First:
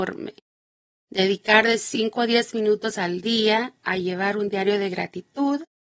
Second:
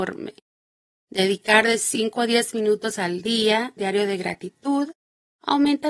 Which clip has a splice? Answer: second; 1 cut; at 3.8 s

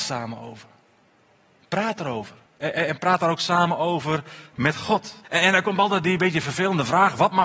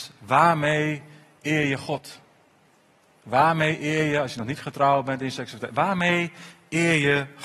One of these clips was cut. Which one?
first; 2 cuts; at 2.5 s, 5.2 s

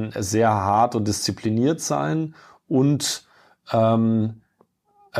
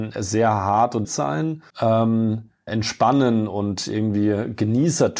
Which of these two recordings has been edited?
second; 3 cuts; at 1.0 s, 1.7 s, 2.7 s

